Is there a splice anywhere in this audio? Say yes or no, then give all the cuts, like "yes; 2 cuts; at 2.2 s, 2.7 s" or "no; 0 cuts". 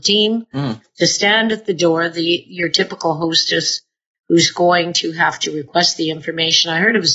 no; 0 cuts